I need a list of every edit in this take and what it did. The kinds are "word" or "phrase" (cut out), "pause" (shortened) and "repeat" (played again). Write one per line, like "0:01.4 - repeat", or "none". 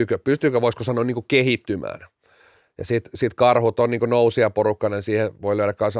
none